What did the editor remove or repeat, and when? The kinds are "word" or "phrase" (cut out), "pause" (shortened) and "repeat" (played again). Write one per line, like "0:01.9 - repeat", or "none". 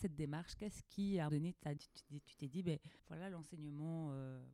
0:01.3 - word
0:01.8 - word
0:03.0 - pause